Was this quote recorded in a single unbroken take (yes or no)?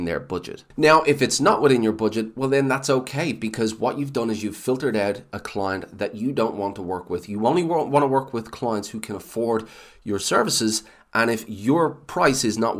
yes